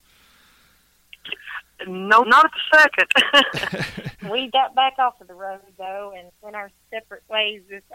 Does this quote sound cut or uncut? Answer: cut